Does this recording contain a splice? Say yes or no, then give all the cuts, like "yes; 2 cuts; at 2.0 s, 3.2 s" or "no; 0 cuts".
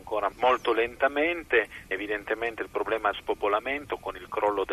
yes; 2 cuts; at 1.9 s, 3.1 s